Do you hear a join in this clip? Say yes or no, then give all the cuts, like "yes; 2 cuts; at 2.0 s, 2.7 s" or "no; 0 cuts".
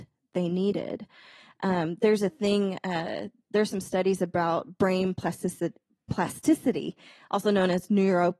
no; 0 cuts